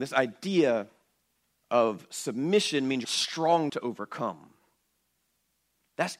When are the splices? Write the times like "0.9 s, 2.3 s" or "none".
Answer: 1.6 s, 3.0 s, 3.7 s

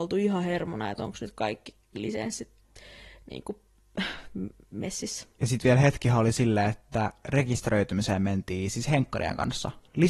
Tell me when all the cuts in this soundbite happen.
none

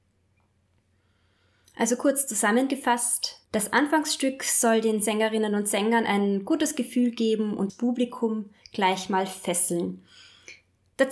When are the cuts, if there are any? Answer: 3.4 s, 7.7 s

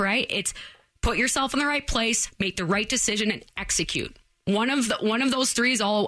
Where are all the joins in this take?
none

